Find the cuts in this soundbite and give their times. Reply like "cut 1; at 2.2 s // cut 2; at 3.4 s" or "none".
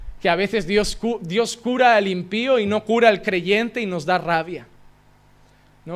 none

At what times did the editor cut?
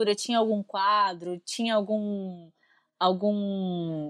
none

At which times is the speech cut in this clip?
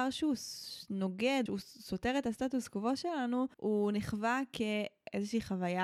cut 1; at 1.5 s // cut 2; at 3.5 s

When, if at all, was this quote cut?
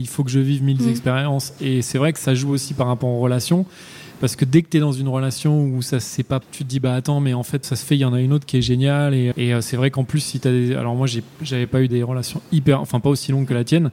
cut 1; at 6.4 s // cut 2; at 7.6 s // cut 3; at 9.3 s // cut 4; at 11.9 s

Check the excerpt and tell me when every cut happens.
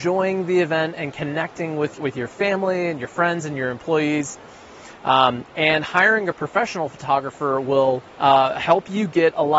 cut 1; at 2.0 s // cut 2; at 8.1 s

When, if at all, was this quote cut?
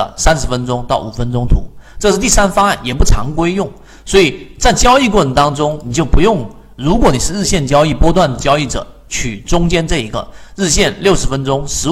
none

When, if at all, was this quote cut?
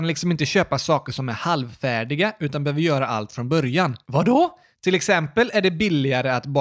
none

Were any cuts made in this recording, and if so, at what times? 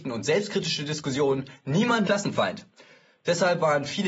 cut 1; at 2.0 s

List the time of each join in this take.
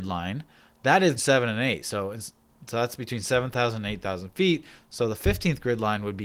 cut 1; at 1.2 s

